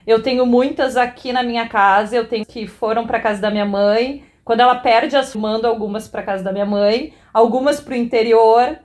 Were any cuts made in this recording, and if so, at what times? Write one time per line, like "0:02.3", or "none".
0:02.4
0:05.3